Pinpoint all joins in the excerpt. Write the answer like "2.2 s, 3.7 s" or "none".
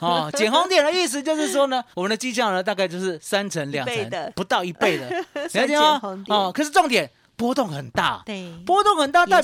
1.9 s, 3.7 s